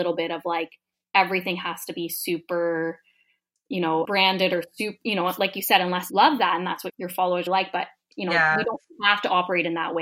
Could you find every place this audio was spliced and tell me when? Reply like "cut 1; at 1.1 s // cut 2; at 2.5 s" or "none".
cut 1; at 4.0 s // cut 2; at 6.1 s // cut 3; at 6.9 s // cut 4; at 7.5 s